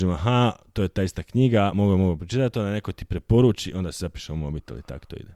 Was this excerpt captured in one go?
yes; 0 cuts

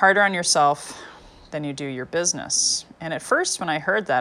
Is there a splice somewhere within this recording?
no; 0 cuts

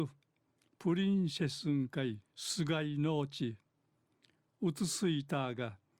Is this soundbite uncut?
no; 1 cut; at 2.2 s

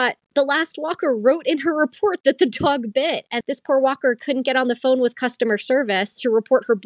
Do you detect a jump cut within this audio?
yes; 1 cut; at 3.4 s

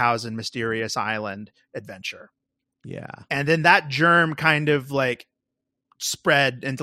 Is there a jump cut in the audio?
no; 0 cuts

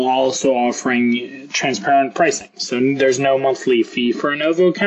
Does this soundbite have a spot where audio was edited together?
no; 0 cuts

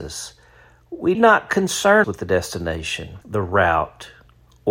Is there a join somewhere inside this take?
yes; 3 cuts; at 1.1 s, 2.0 s, 3.2 s

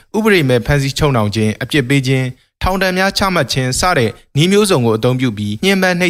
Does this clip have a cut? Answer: no; 0 cuts

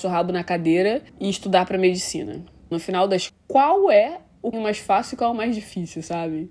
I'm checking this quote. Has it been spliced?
yes; 4 cuts; at 1.1 s, 2.7 s, 3.3 s, 4.5 s

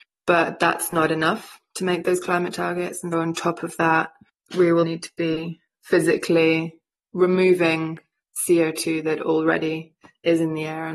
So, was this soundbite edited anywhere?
yes; 2 cuts; at 3.1 s, 4.8 s

